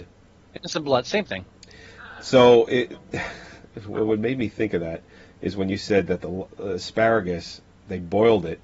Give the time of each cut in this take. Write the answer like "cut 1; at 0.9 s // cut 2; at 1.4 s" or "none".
none